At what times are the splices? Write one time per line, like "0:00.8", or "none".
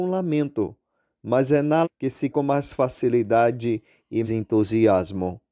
0:01.8
0:02.3
0:04.2